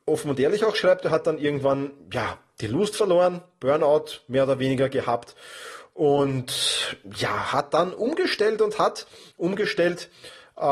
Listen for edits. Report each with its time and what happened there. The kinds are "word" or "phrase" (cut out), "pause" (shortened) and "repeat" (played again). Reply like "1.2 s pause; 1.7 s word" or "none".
none